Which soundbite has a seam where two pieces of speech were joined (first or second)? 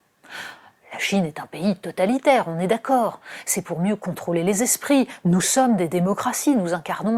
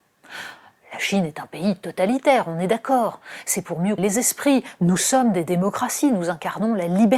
second